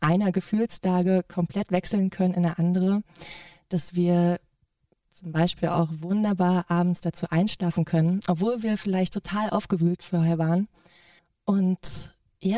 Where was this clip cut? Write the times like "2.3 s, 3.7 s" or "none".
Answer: none